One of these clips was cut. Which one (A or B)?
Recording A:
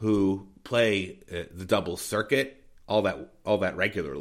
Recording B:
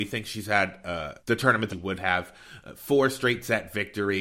B